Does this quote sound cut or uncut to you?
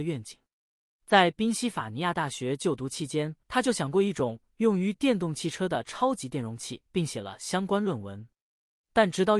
cut